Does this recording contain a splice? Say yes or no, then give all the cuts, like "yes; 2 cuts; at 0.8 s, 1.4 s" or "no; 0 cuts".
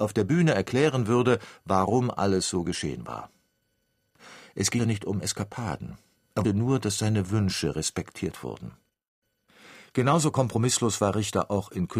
yes; 2 cuts; at 4.8 s, 6.4 s